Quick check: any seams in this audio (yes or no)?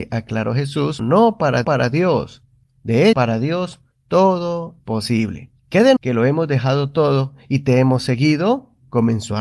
yes